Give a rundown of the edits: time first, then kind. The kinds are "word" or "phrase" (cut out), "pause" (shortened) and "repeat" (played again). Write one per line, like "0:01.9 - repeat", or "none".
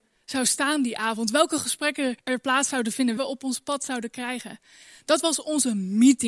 0:02.2 - pause
0:03.2 - phrase